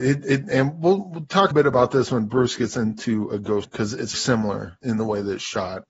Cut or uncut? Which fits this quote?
cut